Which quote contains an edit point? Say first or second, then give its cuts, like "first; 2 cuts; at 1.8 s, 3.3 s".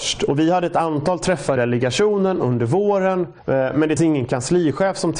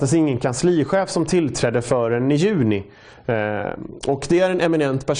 first; 3 cuts; at 1.6 s, 3.4 s, 4.0 s